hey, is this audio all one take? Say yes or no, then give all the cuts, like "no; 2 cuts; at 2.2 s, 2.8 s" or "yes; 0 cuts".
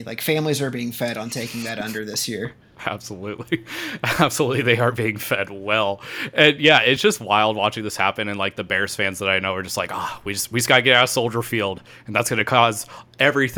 yes; 0 cuts